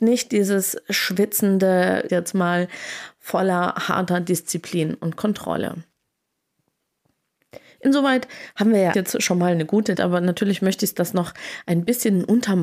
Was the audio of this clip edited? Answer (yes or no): yes